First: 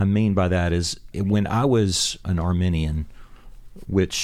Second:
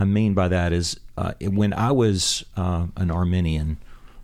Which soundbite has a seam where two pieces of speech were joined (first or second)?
first